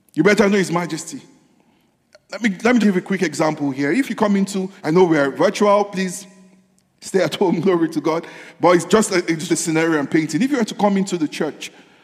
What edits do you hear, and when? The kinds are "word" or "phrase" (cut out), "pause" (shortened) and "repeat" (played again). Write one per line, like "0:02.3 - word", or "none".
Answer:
0:02.8 - word
0:04.8 - pause
0:09.5 - word